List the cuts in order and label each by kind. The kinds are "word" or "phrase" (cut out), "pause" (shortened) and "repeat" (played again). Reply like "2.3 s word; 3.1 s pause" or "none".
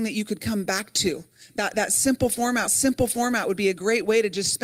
2.7 s repeat